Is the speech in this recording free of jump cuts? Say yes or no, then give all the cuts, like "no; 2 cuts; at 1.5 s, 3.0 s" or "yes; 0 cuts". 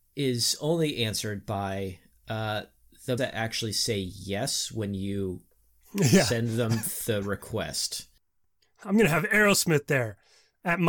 no; 1 cut; at 3.2 s